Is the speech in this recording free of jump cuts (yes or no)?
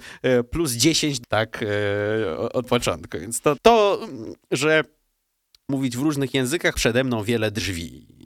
no